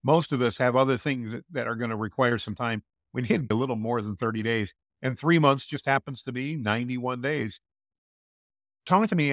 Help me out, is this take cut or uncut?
cut